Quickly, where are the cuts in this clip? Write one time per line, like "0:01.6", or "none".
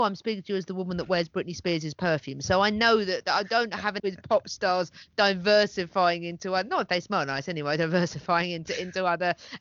0:04.0